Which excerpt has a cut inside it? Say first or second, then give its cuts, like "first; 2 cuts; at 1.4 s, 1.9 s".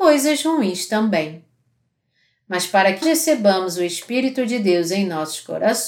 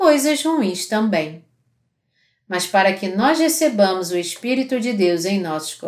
first; 1 cut; at 3.0 s